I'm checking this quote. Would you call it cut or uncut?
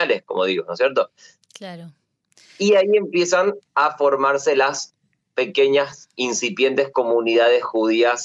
uncut